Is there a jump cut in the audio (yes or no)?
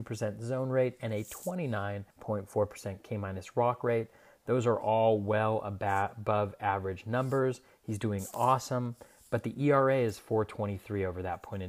yes